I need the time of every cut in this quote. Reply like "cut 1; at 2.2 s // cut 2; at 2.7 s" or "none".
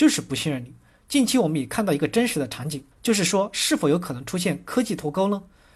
cut 1; at 2.9 s